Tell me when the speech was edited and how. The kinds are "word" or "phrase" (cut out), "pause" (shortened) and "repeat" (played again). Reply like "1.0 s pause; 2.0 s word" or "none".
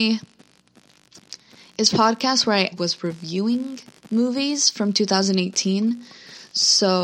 1.9 s word; 2.7 s word; 4.0 s pause